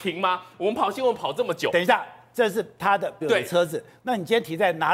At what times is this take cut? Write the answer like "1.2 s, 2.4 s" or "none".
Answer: 3.2 s